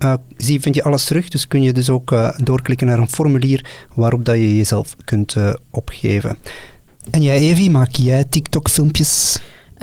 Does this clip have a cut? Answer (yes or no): no